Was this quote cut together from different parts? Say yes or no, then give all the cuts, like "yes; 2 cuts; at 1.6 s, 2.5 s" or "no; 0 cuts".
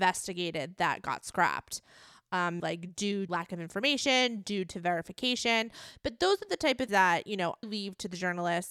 yes; 4 cuts; at 2.6 s, 3.3 s, 6.9 s, 7.6 s